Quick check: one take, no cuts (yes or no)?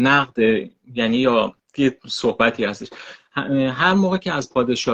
no